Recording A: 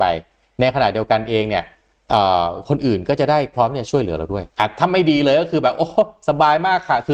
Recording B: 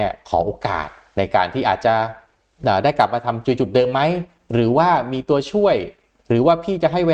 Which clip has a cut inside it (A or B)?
A